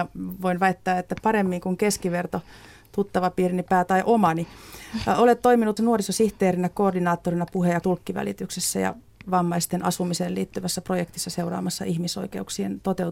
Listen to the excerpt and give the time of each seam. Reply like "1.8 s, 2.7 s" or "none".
1.2 s, 5.8 s, 7.8 s

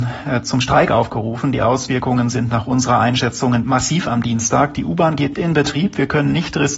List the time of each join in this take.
3.6 s, 5.3 s

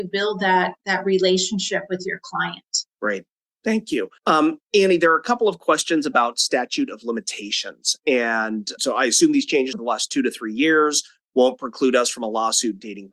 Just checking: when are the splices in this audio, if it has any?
2.9 s, 4.2 s, 8.8 s, 9.7 s

